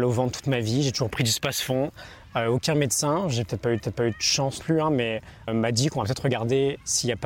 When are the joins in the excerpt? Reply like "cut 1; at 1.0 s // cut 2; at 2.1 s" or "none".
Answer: cut 1; at 3.8 s // cut 2; at 4.6 s // cut 3; at 5.5 s